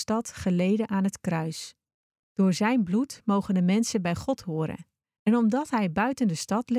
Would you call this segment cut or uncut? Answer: cut